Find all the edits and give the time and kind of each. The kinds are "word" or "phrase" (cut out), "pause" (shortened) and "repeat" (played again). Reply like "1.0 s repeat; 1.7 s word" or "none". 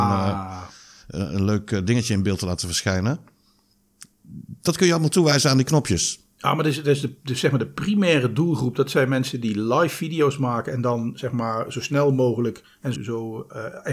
12.9 s word